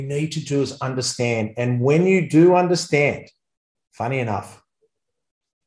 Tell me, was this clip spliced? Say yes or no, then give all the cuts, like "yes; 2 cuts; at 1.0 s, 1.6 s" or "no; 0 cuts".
no; 0 cuts